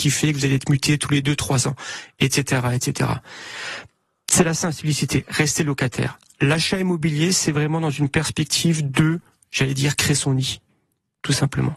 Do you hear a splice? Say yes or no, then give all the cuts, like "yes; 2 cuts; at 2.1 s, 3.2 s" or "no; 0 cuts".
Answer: no; 0 cuts